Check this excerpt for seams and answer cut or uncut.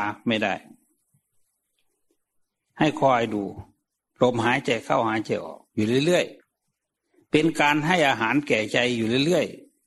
cut